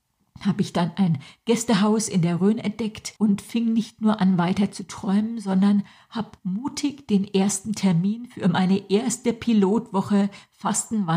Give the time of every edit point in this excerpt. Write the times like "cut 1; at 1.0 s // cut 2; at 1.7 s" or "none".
cut 1; at 3.2 s // cut 2; at 6.4 s